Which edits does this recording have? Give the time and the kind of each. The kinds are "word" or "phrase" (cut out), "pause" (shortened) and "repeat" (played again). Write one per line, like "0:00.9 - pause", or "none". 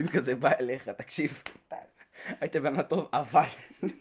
none